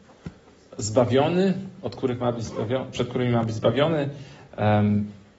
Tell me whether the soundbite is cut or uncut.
uncut